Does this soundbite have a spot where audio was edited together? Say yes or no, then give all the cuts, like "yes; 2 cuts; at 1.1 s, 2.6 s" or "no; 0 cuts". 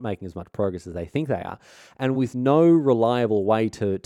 no; 0 cuts